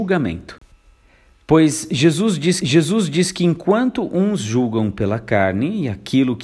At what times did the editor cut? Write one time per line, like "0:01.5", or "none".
0:02.6